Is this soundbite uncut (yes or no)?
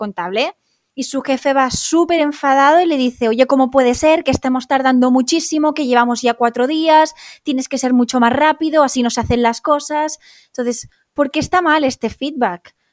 yes